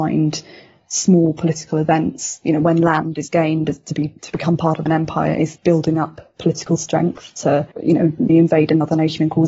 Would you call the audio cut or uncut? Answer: cut